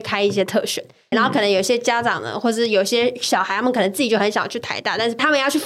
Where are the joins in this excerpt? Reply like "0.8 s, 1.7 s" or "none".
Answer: 1.1 s